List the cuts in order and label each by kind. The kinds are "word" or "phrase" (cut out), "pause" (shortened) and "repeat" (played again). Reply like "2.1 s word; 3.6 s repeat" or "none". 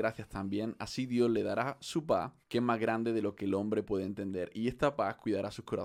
2.4 s pause